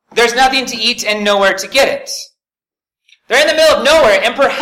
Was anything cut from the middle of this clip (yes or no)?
no